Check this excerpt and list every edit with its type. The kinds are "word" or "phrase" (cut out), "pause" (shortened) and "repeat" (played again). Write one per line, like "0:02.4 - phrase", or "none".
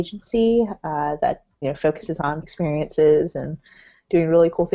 0:01.6 - word
0:02.4 - word